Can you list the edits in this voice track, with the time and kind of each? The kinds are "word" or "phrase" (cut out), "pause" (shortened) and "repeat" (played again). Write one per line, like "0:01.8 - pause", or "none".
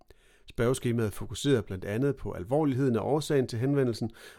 none